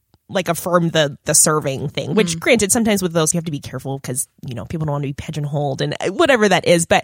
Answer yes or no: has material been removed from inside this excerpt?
yes